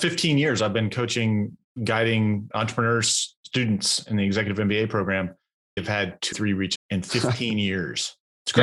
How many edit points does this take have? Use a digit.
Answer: 4